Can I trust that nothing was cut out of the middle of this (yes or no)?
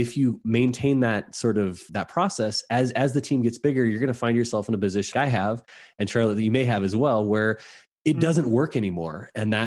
no